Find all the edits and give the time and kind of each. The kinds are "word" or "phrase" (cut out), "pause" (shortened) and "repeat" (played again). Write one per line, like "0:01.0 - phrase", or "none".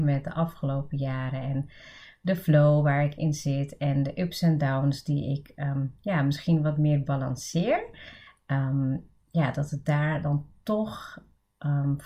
none